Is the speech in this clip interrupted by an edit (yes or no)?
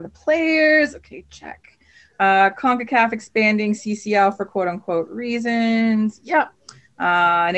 no